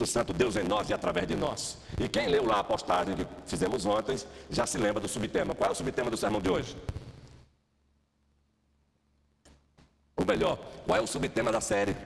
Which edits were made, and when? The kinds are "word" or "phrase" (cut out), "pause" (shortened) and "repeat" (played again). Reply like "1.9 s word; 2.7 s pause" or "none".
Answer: none